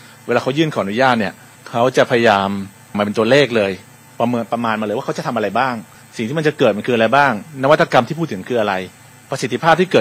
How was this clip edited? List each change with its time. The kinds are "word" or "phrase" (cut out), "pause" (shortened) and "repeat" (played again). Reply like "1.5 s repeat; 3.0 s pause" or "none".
2.9 s word